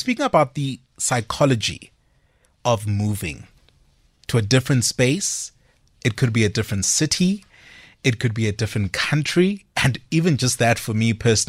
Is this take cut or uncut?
uncut